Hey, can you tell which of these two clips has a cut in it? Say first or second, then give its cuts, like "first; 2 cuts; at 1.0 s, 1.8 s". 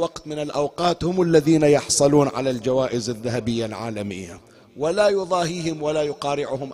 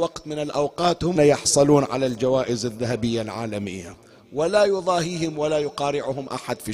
second; 1 cut; at 1.2 s